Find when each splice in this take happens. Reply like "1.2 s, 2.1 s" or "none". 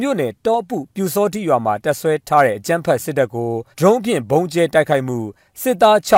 3.7 s